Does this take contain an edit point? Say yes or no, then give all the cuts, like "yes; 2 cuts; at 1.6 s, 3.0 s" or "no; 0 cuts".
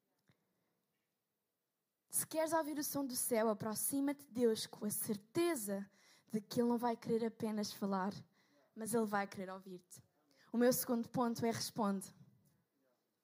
no; 0 cuts